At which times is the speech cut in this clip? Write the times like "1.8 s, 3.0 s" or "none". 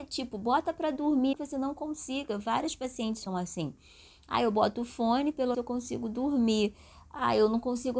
1.3 s, 3.3 s, 5.5 s